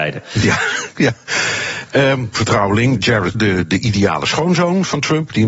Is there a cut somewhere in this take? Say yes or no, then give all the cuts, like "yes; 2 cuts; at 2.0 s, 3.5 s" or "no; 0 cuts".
yes; 3 cuts; at 2.3 s, 3.0 s, 3.3 s